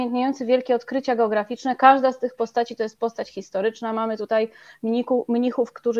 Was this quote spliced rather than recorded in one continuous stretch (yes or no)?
no